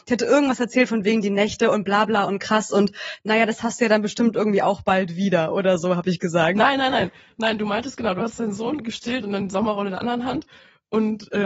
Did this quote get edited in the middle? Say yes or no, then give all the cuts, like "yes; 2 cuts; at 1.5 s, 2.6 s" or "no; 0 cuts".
no; 0 cuts